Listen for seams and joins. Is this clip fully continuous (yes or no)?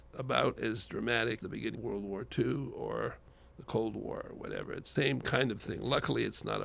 no